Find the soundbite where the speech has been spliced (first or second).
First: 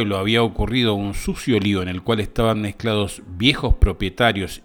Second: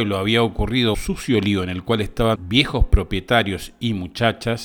second